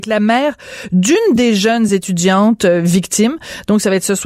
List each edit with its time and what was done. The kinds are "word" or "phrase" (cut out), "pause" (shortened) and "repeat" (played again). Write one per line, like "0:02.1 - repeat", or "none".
none